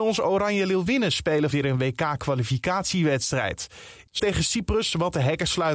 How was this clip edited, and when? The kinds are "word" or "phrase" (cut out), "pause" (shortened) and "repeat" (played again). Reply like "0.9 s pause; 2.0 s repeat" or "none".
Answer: 1.5 s word; 4.2 s word